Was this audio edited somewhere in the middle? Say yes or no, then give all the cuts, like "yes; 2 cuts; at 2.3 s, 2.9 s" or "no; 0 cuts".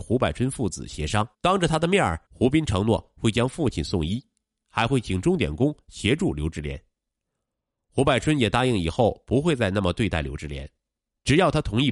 yes; 2 cuts; at 1.3 s, 2.3 s